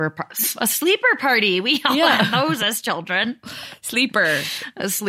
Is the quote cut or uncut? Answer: uncut